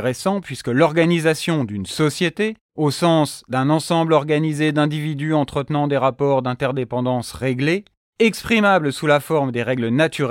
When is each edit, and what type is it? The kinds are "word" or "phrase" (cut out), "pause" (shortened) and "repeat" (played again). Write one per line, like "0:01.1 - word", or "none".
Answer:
none